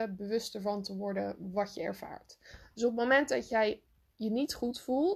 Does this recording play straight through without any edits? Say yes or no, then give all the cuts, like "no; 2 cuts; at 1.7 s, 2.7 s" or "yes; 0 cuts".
yes; 0 cuts